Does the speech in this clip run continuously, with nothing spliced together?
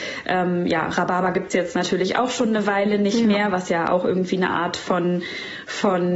yes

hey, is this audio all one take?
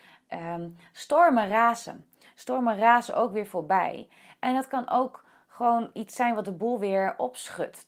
yes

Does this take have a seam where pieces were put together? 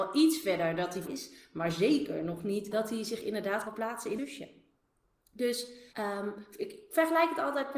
yes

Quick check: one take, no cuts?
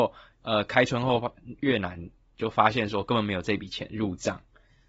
yes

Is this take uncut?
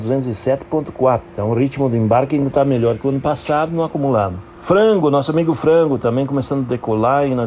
yes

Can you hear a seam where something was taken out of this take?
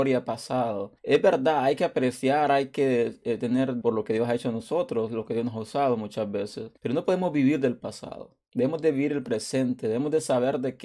yes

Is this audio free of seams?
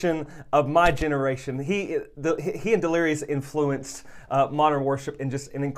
yes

